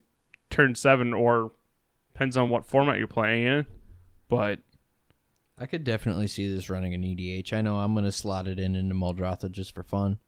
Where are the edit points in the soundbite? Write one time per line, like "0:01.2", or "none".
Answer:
none